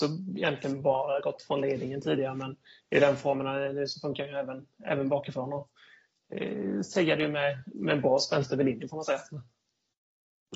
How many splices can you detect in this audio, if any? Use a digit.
0